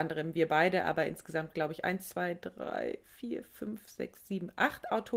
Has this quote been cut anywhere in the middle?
no; 0 cuts

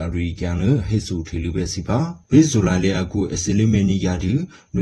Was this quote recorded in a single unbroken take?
no; 1 cut; at 2.2 s

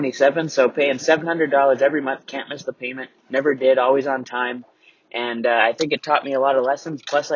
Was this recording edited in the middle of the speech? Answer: yes; 1 cut; at 3.2 s

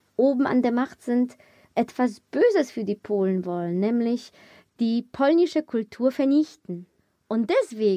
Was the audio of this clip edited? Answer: no; 0 cuts

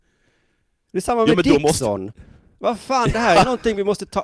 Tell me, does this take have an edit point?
no; 0 cuts

